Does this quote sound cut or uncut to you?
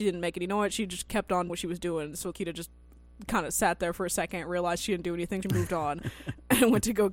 cut